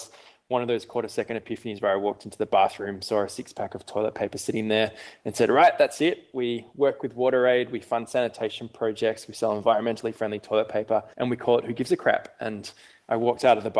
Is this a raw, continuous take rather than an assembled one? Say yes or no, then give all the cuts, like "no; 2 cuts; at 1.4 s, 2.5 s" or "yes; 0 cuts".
no; 1 cut; at 11.1 s